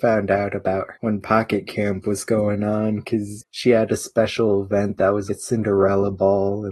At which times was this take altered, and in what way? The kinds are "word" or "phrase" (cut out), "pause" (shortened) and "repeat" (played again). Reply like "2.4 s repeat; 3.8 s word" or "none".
0.9 s word; 5.3 s word